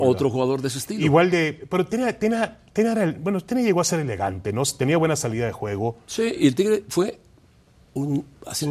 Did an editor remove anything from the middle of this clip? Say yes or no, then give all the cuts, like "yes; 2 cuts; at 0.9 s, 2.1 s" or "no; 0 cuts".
no; 0 cuts